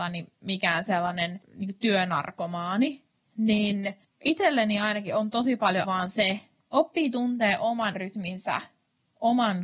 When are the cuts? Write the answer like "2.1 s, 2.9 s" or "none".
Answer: 5.8 s, 6.6 s, 7.9 s